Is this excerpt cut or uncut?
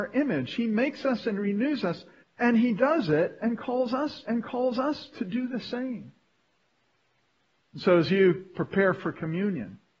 cut